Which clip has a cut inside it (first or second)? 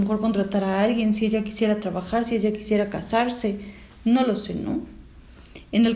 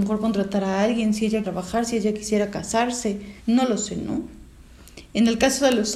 second